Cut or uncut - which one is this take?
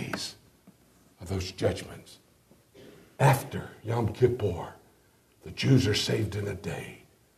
uncut